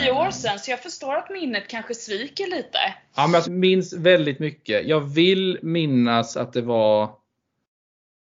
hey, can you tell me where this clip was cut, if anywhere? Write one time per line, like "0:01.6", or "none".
0:03.4

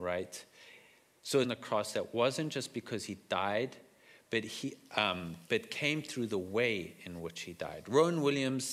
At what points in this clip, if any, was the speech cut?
0:01.4
0:05.4

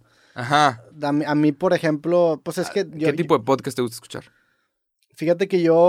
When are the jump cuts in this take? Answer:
none

